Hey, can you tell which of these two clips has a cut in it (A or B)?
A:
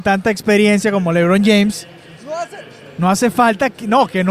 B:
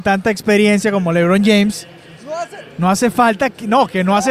B